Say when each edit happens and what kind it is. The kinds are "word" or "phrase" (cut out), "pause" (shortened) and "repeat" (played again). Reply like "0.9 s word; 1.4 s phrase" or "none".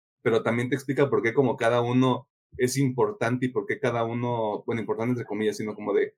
none